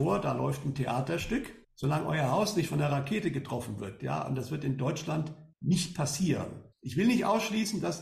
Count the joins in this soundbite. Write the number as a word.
three